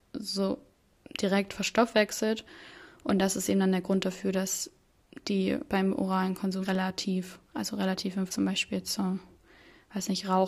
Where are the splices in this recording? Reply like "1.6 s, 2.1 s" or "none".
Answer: 5.7 s, 6.6 s, 7.4 s, 8.3 s